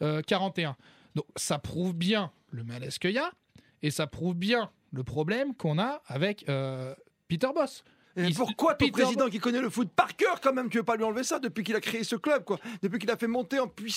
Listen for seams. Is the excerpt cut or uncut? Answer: uncut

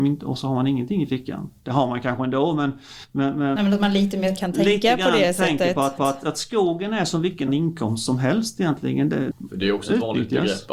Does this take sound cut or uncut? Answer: cut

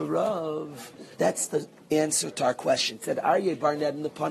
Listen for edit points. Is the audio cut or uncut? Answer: cut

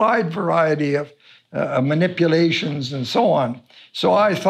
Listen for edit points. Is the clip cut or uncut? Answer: uncut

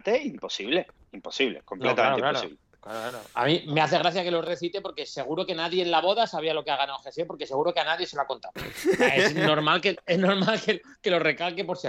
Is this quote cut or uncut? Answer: uncut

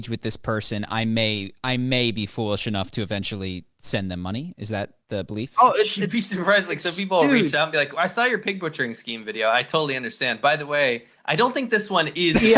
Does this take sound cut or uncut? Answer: uncut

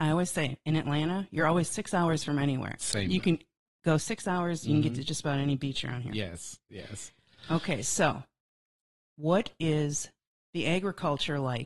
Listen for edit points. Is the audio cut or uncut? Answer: uncut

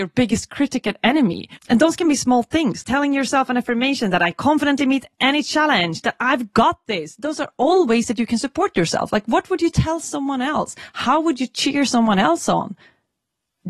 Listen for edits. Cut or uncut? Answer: cut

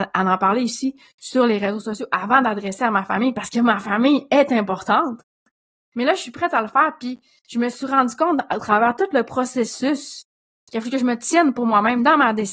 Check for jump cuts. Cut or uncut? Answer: uncut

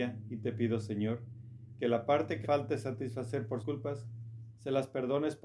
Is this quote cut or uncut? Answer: cut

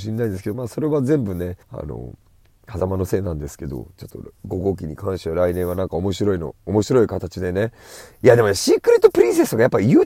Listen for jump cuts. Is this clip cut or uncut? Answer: cut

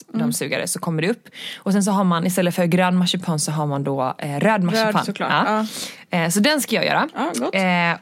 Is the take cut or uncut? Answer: uncut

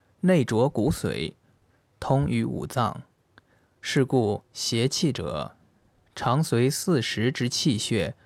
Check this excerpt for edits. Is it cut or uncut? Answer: uncut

